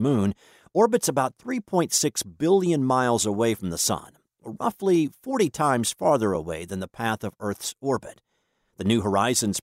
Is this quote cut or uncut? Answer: uncut